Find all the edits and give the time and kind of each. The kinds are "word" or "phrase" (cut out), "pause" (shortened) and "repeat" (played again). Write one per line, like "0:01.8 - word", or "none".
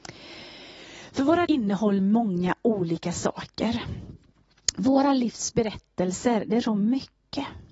0:01.4 - word
0:02.0 - word
0:06.6 - word